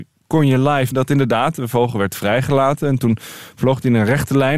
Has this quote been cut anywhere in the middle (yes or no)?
yes